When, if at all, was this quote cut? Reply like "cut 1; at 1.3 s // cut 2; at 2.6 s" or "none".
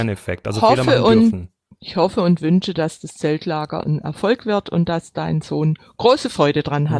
none